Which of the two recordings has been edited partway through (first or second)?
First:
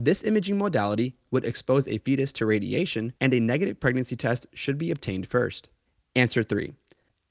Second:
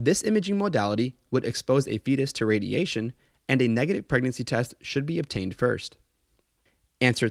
first